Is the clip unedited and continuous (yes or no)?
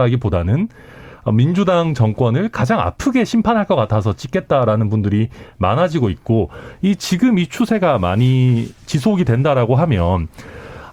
yes